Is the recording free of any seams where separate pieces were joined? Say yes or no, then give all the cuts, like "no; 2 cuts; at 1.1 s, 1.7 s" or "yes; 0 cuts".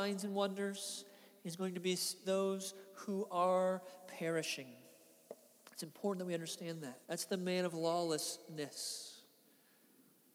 no; 2 cuts; at 2.2 s, 7.0 s